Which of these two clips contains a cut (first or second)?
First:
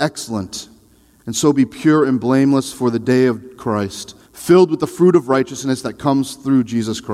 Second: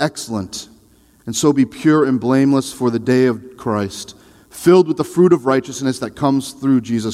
first